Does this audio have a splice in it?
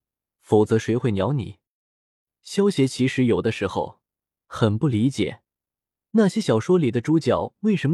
no; 0 cuts

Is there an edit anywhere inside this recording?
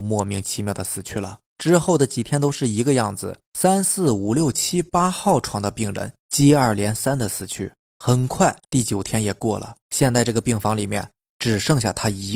yes; 6 cuts; at 1.5 s, 3.5 s, 6.2 s, 7.8 s, 8.6 s, 9.8 s

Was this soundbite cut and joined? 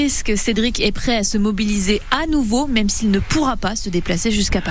no; 0 cuts

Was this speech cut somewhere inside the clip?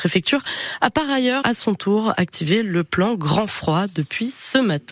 yes; 1 cut; at 1.4 s

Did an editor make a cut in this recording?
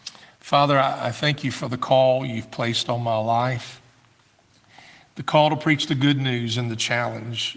no; 0 cuts

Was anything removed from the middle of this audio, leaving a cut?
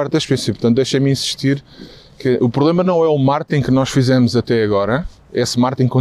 no; 0 cuts

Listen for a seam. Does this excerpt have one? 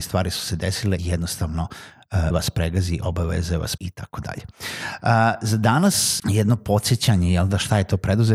yes; 4 cuts; at 1.0 s, 2.3 s, 3.8 s, 6.2 s

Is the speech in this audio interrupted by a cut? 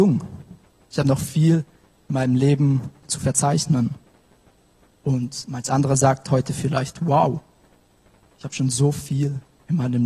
no; 0 cuts

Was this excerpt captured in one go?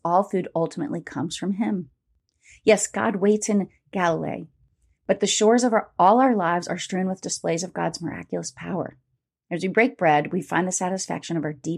yes; 0 cuts

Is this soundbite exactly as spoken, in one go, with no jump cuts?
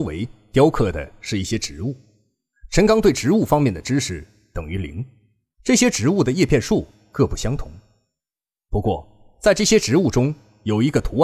yes; 0 cuts

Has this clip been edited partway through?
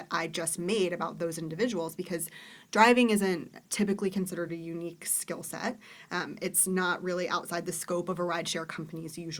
no; 0 cuts

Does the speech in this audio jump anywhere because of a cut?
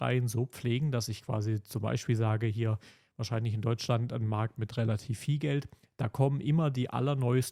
no; 0 cuts

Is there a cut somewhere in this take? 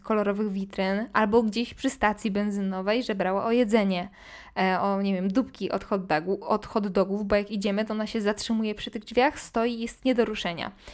no; 0 cuts

